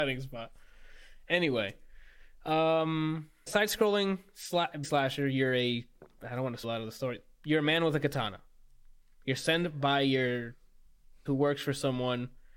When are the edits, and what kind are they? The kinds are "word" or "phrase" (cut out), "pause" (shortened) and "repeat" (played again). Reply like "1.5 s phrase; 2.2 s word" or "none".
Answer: 3.5 s word; 4.8 s word; 6.6 s word; 11.3 s word